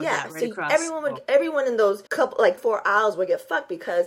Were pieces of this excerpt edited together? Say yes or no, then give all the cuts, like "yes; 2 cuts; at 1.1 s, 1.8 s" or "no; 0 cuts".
yes; 2 cuts; at 2.1 s, 2.6 s